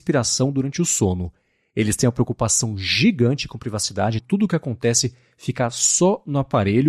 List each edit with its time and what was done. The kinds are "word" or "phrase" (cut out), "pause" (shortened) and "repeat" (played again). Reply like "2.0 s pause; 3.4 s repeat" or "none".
4.2 s word